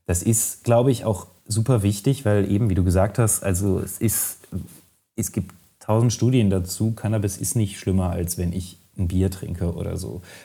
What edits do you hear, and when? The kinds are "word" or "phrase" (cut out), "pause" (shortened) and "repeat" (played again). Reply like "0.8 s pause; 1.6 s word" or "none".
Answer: none